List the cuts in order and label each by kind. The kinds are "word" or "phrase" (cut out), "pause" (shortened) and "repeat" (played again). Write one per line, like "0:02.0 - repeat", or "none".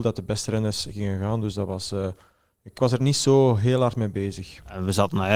0:02.7 - phrase